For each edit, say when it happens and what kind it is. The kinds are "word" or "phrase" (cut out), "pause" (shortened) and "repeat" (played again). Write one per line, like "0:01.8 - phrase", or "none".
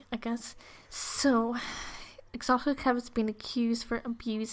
0:02.3 - pause